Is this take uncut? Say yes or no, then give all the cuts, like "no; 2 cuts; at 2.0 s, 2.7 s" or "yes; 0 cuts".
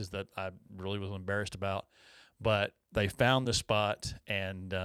yes; 0 cuts